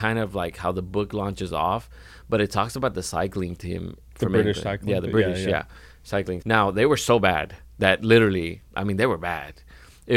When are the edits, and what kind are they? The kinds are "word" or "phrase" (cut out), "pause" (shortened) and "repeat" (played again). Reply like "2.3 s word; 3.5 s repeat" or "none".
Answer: 4.1 s word; 6.4 s word